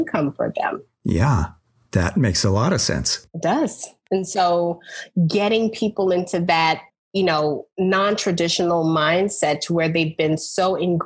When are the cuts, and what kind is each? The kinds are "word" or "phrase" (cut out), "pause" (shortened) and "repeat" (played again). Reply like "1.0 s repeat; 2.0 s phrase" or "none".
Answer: 6.9 s pause